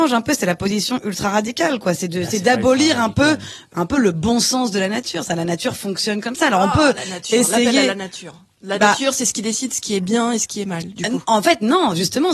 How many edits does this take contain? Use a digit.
0